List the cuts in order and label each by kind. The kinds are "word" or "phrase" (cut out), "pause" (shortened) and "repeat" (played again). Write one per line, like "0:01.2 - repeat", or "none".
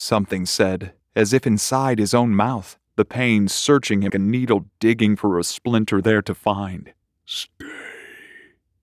0:02.9 - pause
0:04.1 - word
0:06.0 - phrase
0:07.0 - pause